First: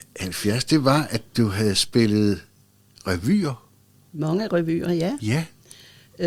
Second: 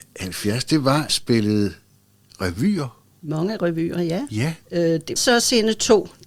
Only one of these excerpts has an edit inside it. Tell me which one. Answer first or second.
second